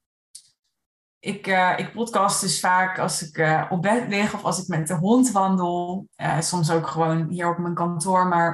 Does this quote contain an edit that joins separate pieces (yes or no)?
no